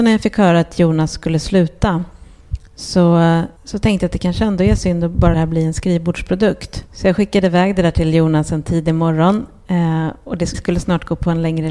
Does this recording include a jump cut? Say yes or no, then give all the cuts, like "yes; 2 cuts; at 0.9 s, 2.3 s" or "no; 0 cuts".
yes; 4 cuts; at 3.6 s, 5.3 s, 6.9 s, 10.5 s